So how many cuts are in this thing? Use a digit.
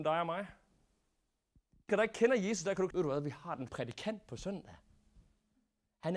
3